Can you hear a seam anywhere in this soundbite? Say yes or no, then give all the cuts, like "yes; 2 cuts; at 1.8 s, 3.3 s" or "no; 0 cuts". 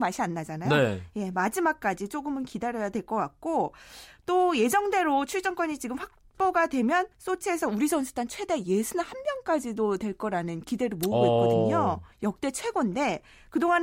yes; 2 cuts; at 7.1 s, 12.1 s